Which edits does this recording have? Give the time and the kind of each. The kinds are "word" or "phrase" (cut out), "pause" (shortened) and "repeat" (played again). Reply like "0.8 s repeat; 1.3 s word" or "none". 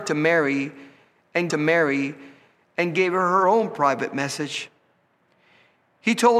1.5 s repeat